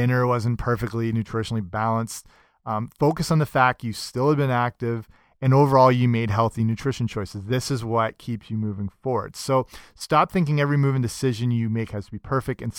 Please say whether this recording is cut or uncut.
uncut